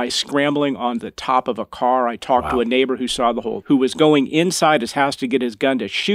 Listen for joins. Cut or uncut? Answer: cut